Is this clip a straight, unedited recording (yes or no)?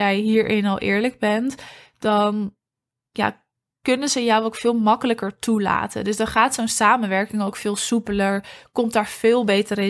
yes